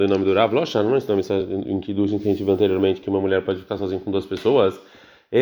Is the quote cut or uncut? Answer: uncut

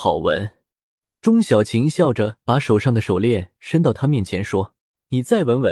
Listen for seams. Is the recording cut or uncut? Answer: cut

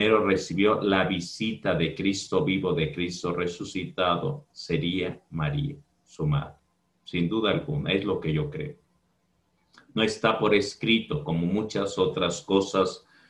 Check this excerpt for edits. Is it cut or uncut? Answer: uncut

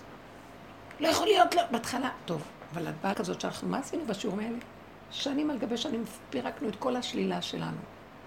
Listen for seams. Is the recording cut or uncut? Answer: cut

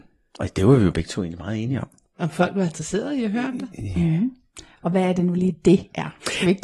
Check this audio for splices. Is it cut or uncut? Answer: uncut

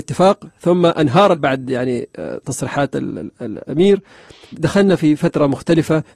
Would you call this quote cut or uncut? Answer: cut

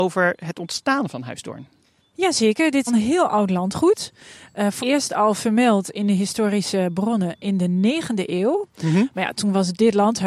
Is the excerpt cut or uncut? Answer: cut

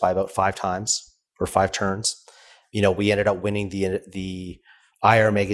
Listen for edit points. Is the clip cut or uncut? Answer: uncut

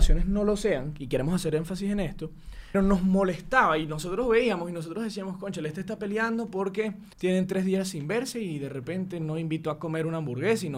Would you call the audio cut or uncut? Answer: cut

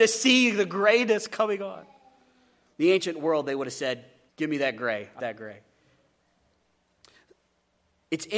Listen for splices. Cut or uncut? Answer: cut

